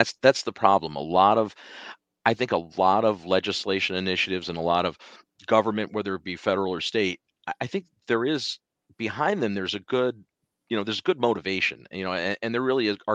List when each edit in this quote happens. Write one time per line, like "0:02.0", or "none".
none